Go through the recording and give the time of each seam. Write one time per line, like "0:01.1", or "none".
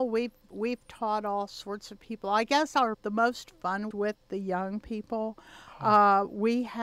0:02.9
0:03.9